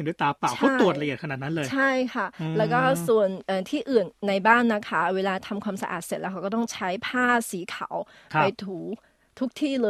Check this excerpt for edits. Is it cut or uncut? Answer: uncut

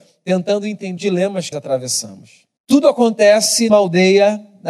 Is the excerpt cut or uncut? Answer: cut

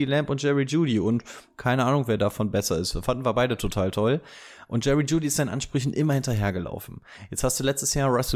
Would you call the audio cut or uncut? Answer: uncut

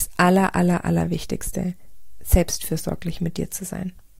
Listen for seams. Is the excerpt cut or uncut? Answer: uncut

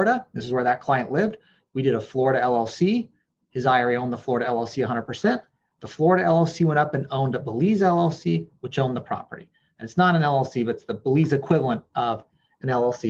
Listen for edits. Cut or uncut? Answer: uncut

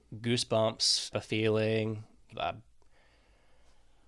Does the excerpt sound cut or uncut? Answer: cut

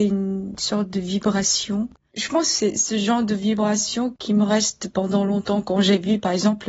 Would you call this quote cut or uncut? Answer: uncut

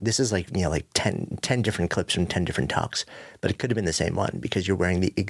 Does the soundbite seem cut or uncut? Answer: uncut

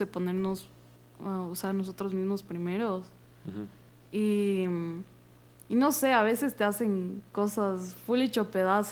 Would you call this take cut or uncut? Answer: uncut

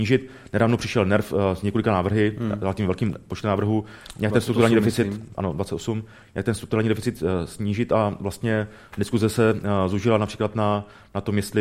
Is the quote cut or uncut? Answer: uncut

